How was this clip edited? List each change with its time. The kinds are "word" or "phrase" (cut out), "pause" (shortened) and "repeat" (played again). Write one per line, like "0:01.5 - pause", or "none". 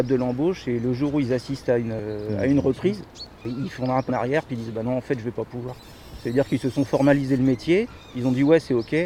0:04.1 - word